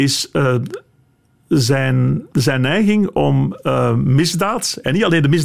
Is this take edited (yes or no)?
yes